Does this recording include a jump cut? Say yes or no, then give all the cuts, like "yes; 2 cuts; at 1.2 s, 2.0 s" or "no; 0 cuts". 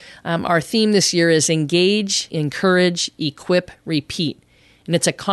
no; 0 cuts